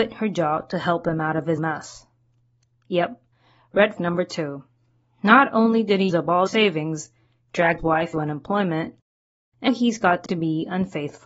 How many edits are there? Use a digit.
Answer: 8